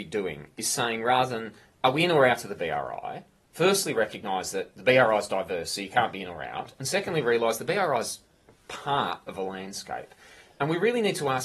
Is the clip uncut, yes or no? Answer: yes